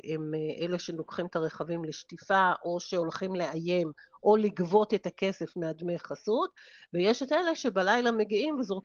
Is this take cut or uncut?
uncut